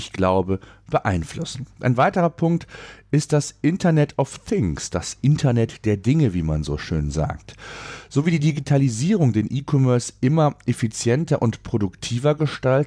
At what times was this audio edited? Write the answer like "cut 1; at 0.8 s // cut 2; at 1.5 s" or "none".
cut 1; at 1.7 s

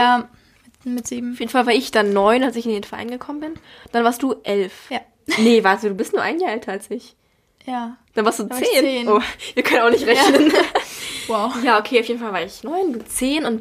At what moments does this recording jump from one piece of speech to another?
none

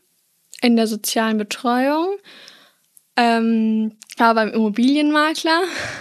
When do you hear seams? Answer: cut 1; at 4.2 s

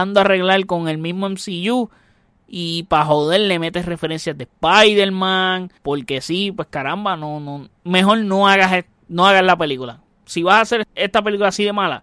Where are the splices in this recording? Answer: cut 1; at 5.8 s // cut 2; at 7.8 s // cut 3; at 10.8 s

